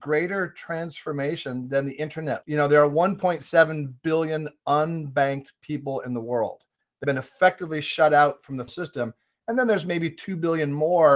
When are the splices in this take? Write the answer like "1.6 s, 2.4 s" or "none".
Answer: 2.4 s, 7.0 s, 8.7 s